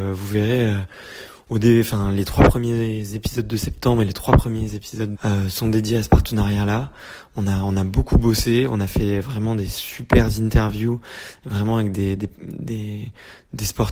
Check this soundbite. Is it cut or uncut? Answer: cut